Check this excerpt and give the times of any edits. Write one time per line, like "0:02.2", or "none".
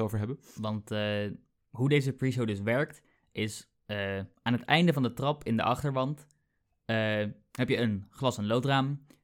0:04.4

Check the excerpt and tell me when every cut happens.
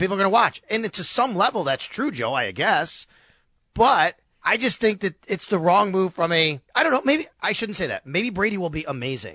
0:04.3
0:06.7

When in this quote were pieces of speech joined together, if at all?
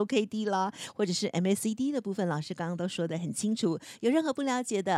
none

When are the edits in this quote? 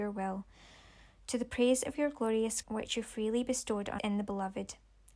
0:02.6
0:04.0

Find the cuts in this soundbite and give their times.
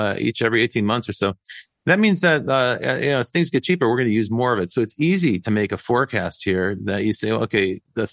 none

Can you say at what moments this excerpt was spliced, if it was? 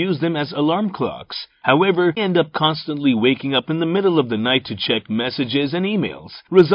0:02.2

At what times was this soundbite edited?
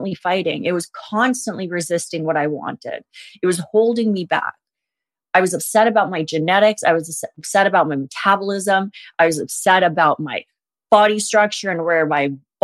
none

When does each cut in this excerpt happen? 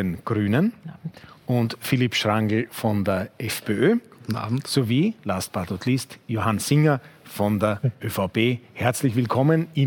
none

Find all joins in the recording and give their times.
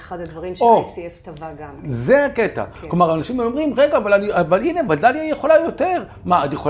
none

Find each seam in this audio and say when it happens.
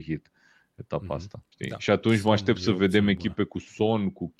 0:01.5

